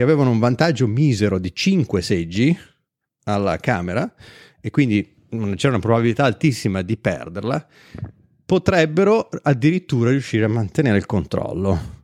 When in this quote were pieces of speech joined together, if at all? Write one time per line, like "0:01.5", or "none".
none